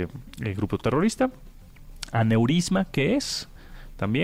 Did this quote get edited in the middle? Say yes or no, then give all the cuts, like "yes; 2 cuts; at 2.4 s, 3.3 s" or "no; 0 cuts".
no; 0 cuts